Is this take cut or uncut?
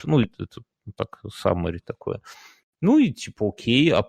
uncut